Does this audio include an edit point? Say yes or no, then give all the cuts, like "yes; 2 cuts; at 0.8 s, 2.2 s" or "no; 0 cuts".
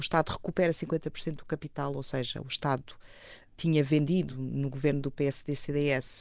no; 0 cuts